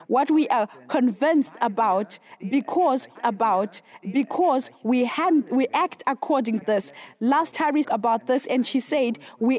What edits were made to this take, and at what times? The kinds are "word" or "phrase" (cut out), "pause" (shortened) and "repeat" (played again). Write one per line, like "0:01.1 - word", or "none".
0:03.2 - repeat
0:06.6 - word
0:07.5 - word
0:07.8 - word

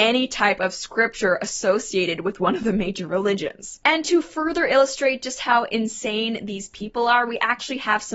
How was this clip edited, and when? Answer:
none

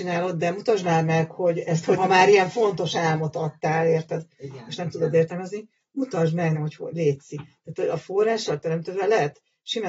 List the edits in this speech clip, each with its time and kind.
0:02.0 - word
0:06.5 - word

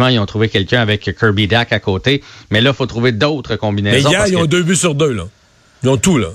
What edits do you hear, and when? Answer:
none

